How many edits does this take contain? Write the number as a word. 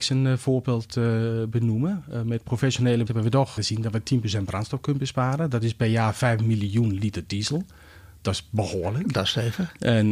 two